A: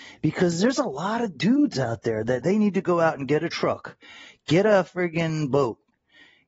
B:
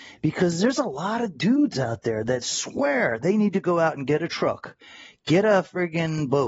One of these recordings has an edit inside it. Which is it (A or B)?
A